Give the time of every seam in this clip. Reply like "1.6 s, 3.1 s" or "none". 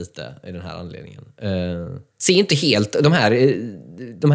2.1 s